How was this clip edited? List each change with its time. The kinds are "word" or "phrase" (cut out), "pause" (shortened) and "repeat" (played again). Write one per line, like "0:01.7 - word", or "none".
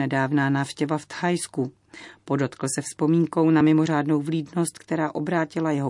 none